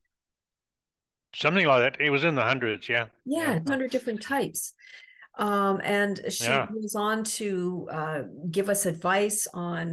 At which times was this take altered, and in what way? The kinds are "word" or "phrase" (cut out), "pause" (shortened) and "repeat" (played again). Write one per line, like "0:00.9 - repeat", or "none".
0:03.7 - word